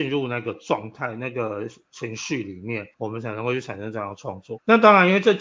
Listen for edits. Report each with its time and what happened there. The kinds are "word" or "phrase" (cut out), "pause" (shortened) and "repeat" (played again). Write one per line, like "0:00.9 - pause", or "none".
0:02.9 - pause